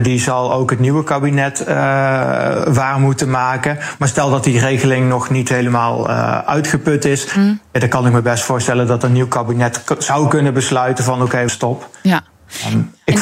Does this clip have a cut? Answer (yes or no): yes